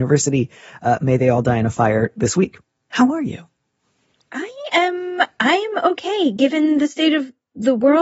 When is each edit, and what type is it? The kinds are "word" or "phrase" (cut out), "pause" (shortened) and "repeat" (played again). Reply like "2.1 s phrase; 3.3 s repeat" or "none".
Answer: none

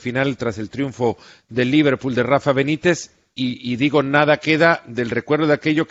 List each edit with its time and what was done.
none

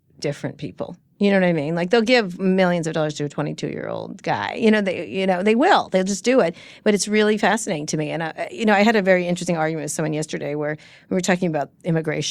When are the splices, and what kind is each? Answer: none

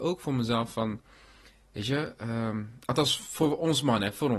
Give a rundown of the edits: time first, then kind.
none

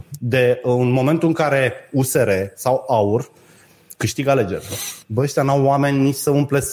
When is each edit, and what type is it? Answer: 5.0 s pause

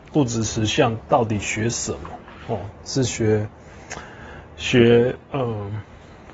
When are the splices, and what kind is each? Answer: 5.2 s pause

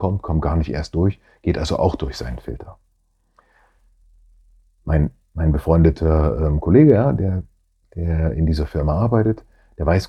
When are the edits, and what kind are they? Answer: none

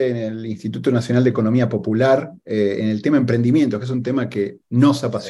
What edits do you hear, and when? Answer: none

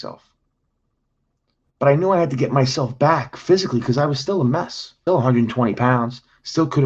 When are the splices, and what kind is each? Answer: 5.1 s word

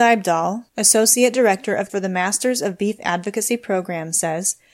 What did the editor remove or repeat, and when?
1.9 s word

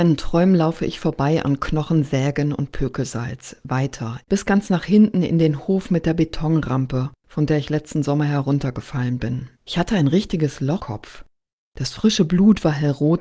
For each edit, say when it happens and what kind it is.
4.2 s phrase; 7.2 s pause; 9.6 s pause; 10.8 s word

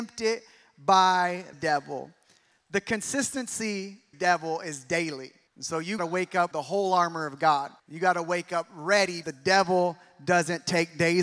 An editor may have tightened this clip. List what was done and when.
1.5 s word; 4.1 s phrase; 5.5 s pause; 6.0 s word; 6.5 s word; 7.8 s pause; 9.2 s word

